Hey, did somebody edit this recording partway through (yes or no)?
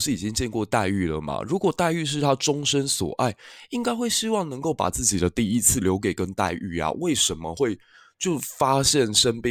no